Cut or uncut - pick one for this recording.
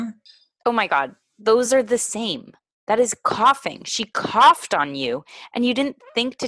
uncut